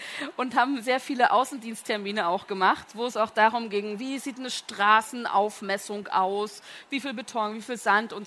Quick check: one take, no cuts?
yes; 0 cuts

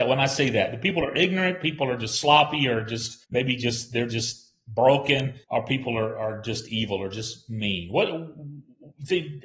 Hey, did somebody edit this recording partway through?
yes; 2 cuts; at 3.2 s, 5.4 s

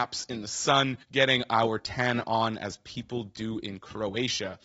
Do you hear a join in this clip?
yes; 1 cut; at 1.0 s

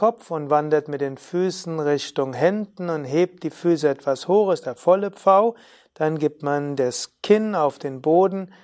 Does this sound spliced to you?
no; 0 cuts

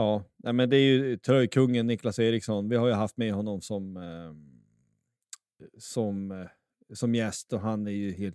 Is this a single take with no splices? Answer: yes; 0 cuts

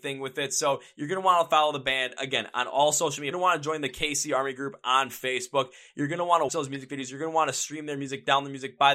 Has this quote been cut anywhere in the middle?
yes; 2 cuts; at 3.3 s, 6.5 s

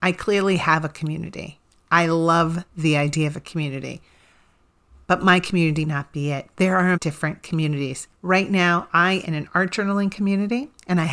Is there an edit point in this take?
yes; 4 cuts; at 5.8 s, 6.9 s, 8.1 s, 9.2 s

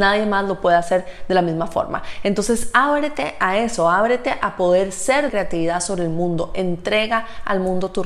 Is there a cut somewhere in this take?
yes; 1 cut; at 5.3 s

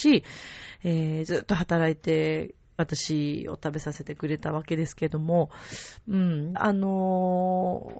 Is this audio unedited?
no; 2 cuts; at 2.8 s, 6.5 s

